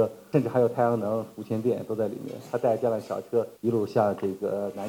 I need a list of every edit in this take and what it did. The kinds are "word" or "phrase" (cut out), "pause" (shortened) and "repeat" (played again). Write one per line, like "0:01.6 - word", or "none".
0:03.6 - pause